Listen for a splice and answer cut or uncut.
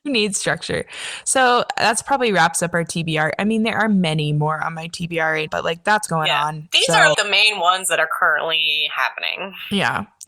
cut